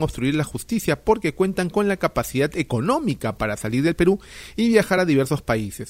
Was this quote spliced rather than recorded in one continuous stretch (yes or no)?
no